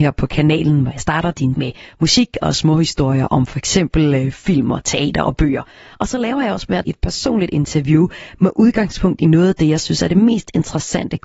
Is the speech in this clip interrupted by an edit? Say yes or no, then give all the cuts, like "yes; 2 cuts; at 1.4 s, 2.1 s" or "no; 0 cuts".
yes; 2 cuts; at 1.6 s, 6.8 s